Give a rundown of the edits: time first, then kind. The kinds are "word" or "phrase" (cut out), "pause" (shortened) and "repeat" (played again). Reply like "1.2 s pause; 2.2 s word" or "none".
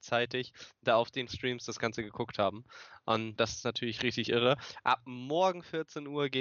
1.3 s word; 3.4 s word; 4.0 s word